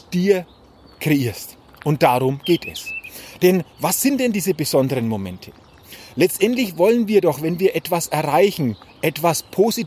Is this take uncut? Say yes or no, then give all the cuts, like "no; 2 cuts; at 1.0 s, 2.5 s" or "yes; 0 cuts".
yes; 0 cuts